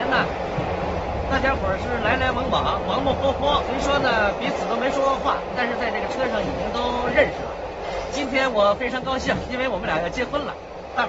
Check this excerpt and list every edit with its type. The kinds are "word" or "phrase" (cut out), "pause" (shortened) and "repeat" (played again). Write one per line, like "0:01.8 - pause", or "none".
0:03.6 - word